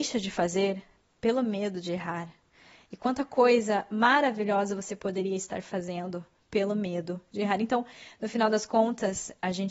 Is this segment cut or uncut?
uncut